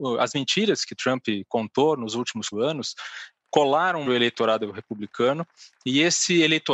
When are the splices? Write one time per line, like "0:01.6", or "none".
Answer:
0:02.5
0:04.1